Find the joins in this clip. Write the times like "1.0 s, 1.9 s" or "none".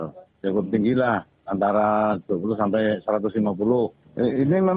none